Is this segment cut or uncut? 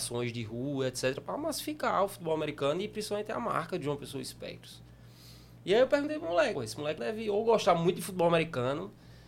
cut